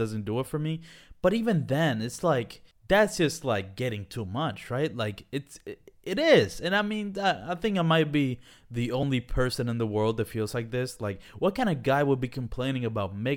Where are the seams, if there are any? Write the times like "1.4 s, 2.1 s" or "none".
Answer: 2.7 s